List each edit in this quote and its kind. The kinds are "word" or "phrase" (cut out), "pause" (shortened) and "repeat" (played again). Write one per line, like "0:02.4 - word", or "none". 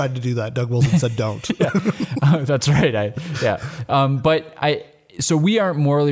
none